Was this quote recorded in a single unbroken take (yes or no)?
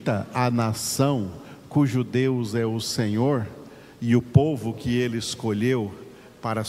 yes